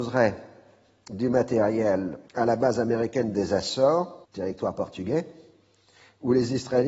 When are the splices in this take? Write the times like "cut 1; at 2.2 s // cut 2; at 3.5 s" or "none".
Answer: cut 1; at 2.3 s // cut 2; at 4.2 s